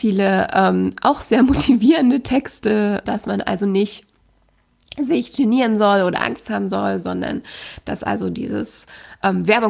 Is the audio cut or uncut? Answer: cut